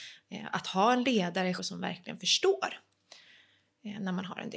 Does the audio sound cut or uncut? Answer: cut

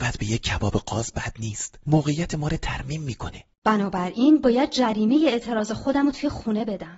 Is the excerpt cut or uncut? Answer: cut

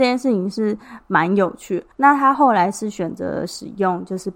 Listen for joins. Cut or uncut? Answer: cut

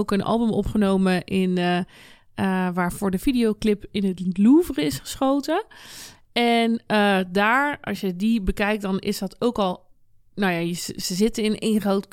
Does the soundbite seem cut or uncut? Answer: uncut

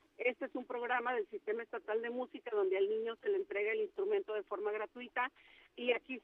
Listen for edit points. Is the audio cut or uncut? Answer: uncut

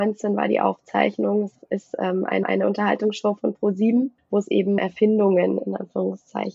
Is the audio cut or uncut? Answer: cut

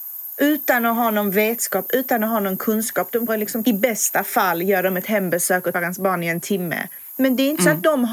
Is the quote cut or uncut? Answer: cut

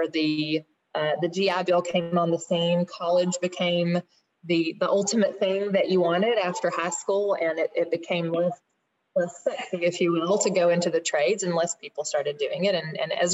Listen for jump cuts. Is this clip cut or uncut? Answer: uncut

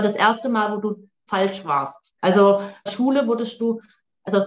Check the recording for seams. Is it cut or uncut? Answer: cut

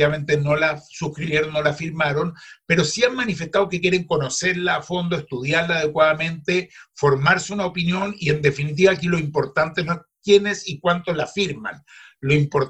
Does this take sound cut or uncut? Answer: uncut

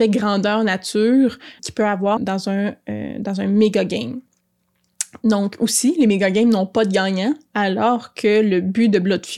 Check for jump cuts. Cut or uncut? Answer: cut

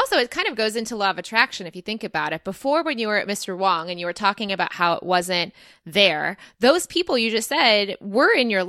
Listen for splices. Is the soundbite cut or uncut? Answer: uncut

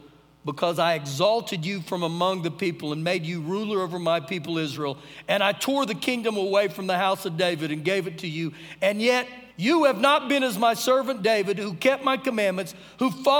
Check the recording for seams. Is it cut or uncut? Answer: cut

